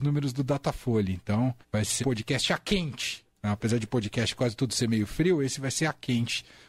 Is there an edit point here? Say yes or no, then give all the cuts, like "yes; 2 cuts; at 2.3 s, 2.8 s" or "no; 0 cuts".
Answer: yes; 2 cuts; at 1.6 s, 2.0 s